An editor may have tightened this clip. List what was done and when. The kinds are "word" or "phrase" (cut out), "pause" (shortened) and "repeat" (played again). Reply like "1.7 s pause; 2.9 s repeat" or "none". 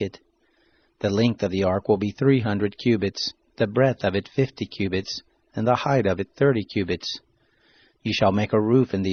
none